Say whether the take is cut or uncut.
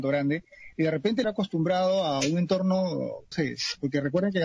cut